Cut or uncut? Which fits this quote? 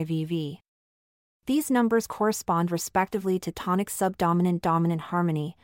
uncut